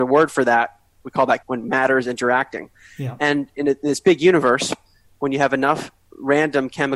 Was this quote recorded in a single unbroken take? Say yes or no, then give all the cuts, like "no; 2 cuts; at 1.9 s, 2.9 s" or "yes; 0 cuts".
no; 1 cut; at 1.4 s